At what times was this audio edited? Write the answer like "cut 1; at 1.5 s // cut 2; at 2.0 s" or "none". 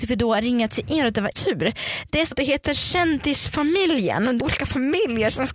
cut 1; at 1.3 s // cut 2; at 2.3 s // cut 3; at 4.4 s